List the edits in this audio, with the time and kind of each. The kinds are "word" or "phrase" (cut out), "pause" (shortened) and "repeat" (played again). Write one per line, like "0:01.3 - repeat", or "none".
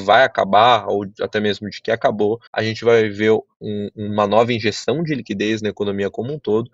0:02.5 - pause